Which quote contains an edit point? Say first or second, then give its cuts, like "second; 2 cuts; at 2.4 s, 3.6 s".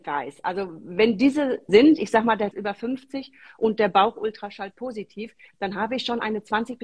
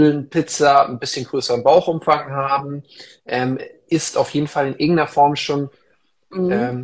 first; 2 cuts; at 1.7 s, 2.5 s